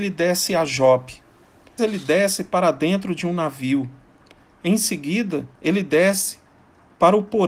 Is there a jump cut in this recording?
yes; 2 cuts; at 1.8 s, 5.5 s

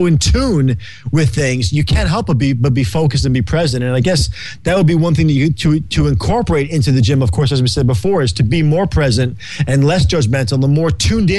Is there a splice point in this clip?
no; 0 cuts

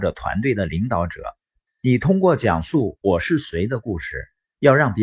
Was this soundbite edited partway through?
no; 0 cuts

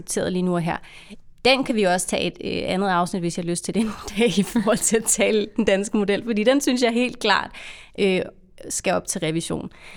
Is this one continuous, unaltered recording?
yes; 0 cuts

